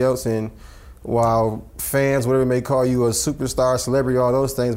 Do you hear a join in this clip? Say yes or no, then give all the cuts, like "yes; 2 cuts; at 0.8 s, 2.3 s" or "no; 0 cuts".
no; 0 cuts